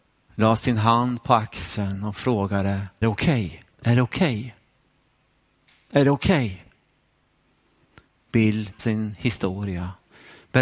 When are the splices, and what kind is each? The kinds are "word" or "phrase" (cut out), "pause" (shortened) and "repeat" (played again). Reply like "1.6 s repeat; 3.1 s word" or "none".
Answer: 3.0 s word; 3.7 s pause; 8.8 s word